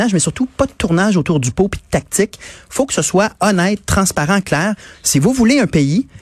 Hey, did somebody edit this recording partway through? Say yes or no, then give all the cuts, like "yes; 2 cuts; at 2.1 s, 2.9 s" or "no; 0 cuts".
no; 0 cuts